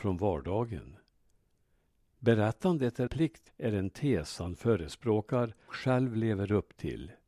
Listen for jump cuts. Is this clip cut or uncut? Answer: cut